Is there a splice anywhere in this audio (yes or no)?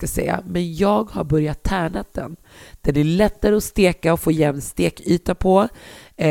no